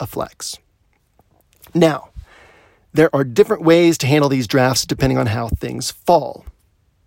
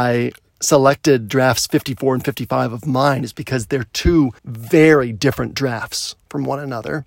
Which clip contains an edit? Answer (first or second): second